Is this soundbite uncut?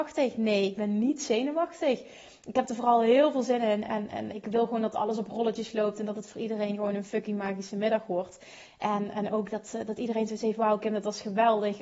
yes; 0 cuts

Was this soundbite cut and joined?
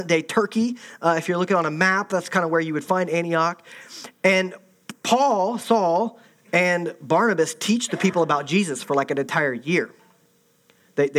no; 0 cuts

